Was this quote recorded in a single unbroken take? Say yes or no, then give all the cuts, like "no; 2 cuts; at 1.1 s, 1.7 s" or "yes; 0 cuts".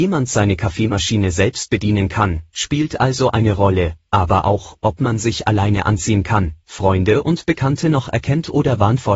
yes; 0 cuts